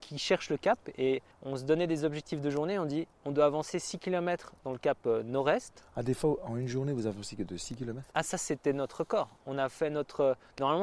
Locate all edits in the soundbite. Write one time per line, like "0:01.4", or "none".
0:01.3
0:08.1